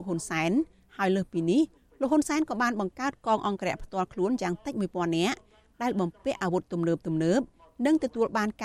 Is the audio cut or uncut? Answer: uncut